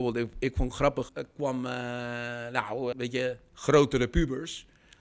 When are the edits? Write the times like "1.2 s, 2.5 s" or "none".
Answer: 1.1 s, 2.9 s